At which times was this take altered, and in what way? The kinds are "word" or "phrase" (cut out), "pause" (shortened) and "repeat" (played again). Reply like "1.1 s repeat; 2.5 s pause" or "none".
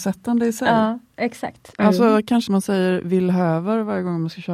2.5 s phrase